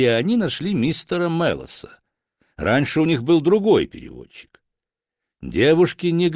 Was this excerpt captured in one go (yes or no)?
yes